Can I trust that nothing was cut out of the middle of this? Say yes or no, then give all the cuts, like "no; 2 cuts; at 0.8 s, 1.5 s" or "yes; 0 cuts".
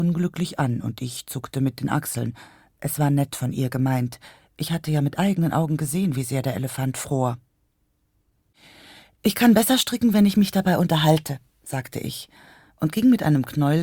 yes; 0 cuts